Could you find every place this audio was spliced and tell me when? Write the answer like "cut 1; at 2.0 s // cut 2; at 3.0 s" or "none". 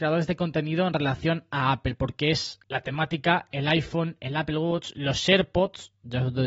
cut 1; at 2.6 s

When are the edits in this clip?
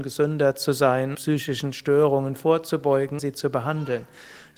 cut 1; at 1.1 s // cut 2; at 3.2 s

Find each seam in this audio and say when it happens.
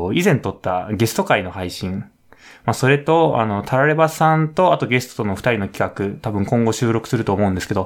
none

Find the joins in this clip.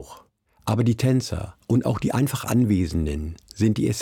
cut 1; at 1.6 s

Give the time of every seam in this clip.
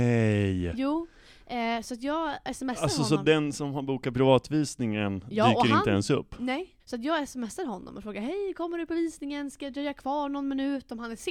cut 1; at 6.8 s

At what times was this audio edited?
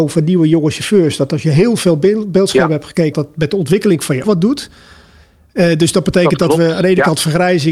cut 1; at 3.1 s // cut 2; at 4.2 s

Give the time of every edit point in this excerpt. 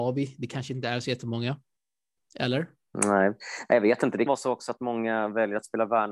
cut 1; at 4.3 s

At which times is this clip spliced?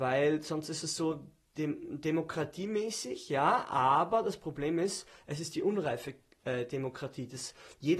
none

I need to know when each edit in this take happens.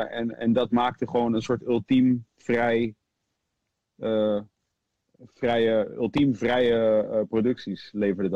none

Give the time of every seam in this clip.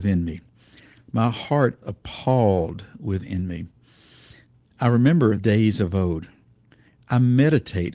cut 1; at 1.8 s // cut 2; at 5.4 s

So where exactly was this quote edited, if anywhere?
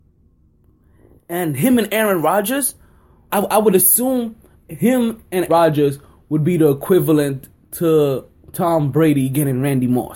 cut 1; at 3.3 s // cut 2; at 4.5 s // cut 3; at 5.5 s

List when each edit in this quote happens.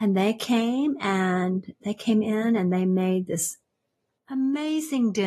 none

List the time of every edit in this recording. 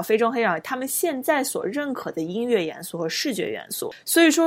none

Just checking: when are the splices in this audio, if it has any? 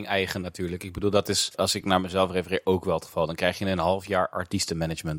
none

